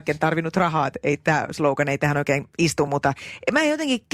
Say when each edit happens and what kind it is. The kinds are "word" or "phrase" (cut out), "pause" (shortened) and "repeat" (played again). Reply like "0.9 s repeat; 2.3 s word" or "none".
none